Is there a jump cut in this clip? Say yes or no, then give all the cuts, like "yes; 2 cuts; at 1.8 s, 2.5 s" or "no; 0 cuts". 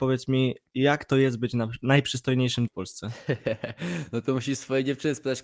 yes; 1 cut; at 2.7 s